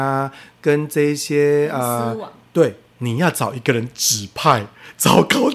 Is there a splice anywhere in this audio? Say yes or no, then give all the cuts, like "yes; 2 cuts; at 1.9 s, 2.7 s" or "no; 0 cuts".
no; 0 cuts